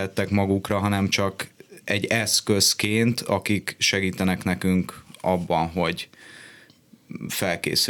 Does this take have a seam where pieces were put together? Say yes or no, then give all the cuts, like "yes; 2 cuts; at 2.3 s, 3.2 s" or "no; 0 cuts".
no; 0 cuts